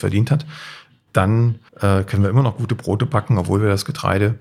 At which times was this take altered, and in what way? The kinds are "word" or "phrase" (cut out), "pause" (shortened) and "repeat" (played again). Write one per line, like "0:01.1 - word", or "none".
0:01.7 - pause

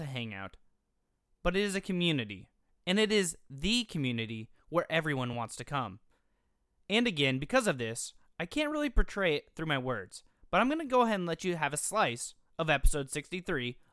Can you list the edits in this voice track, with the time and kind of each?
none

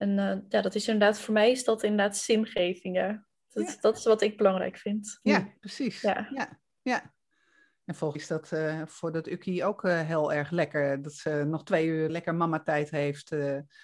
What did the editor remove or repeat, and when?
0:08.1 - word
0:12.1 - word

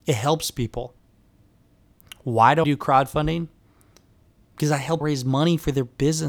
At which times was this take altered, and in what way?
0:02.6 - word
0:05.0 - word

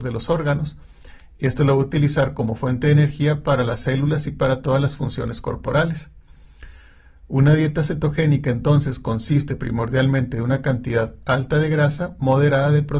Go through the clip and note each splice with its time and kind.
none

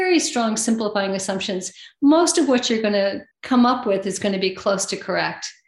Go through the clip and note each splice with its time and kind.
0:03.3 - pause

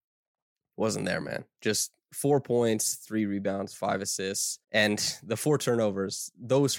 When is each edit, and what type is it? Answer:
0:04.6 - pause

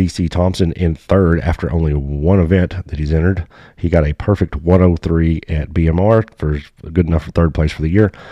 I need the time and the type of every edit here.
none

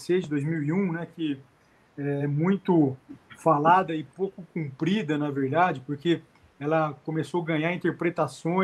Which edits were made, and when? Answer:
none

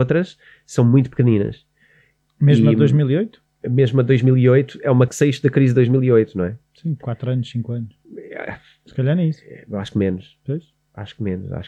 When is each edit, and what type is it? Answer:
0:03.5 - pause
0:05.1 - phrase
0:08.0 - pause

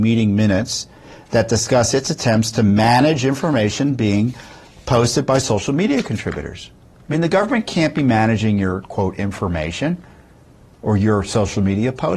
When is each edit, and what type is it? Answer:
none

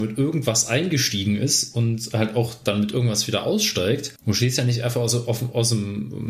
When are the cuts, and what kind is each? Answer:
0:04.2 - pause

